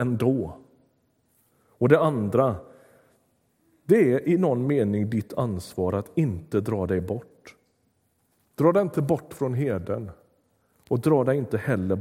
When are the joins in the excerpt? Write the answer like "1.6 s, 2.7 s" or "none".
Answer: none